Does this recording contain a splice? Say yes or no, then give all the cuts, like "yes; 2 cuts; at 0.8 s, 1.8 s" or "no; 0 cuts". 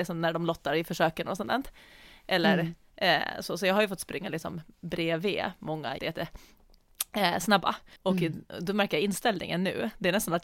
yes; 2 cuts; at 6.0 s, 8.0 s